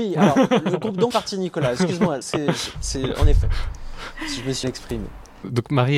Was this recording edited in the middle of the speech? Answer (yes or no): yes